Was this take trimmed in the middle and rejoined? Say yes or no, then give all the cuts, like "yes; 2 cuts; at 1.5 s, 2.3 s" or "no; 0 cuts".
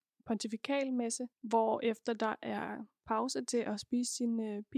yes; 1 cut; at 1.3 s